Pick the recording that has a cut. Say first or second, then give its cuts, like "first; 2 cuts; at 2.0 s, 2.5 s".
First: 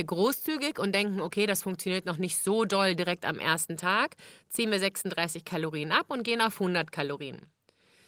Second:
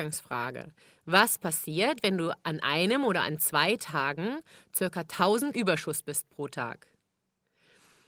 second; 1 cut; at 5.5 s